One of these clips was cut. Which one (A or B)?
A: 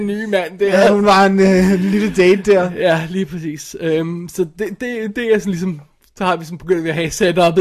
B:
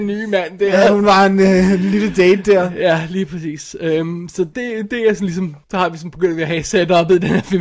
B